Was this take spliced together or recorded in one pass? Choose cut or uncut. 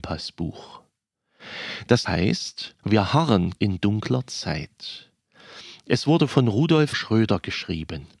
cut